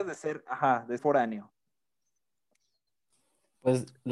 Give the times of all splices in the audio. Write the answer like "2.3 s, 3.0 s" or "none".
1.0 s